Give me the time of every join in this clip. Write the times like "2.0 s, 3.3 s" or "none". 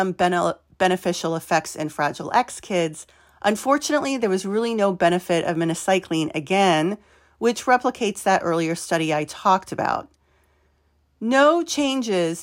none